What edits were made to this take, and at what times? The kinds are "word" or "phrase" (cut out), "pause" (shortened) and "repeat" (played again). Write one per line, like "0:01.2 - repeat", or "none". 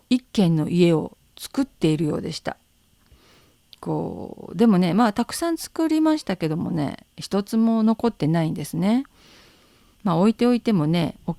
none